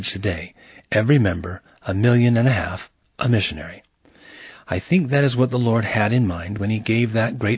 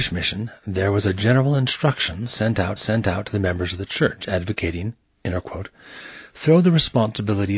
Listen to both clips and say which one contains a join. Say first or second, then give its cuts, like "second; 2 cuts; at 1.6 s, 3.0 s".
second; 1 cut; at 2.8 s